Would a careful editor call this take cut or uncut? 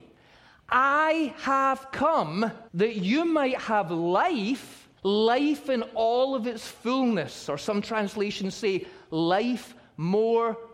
cut